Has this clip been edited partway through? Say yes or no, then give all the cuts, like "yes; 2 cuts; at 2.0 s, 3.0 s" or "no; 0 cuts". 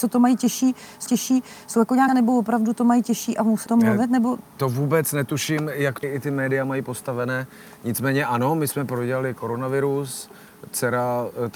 yes; 4 cuts; at 1.1 s, 2.1 s, 3.7 s, 6.0 s